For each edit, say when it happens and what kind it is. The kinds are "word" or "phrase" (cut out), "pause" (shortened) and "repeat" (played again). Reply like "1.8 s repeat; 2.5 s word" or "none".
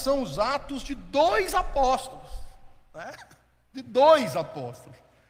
none